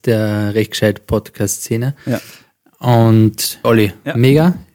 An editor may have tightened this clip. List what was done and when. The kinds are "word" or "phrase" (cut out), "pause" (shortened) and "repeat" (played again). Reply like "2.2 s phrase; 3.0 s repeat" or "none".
3.6 s phrase